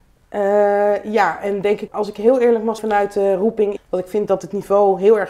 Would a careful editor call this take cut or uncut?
cut